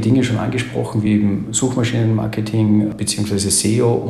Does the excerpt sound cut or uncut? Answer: uncut